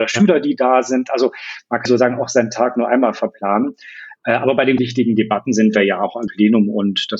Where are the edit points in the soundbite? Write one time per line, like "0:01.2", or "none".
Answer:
0:01.9
0:04.8
0:06.3